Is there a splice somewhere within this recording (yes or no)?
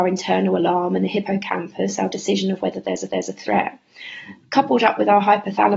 yes